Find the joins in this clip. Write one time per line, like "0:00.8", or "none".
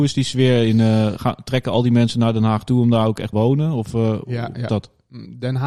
0:01.2
0:03.3
0:04.7